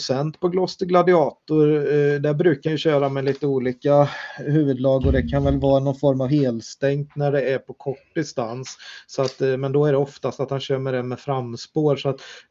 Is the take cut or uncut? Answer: cut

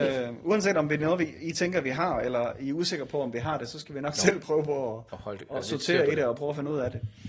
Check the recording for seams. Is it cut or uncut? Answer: cut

